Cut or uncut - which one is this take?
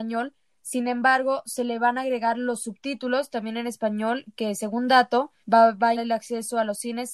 cut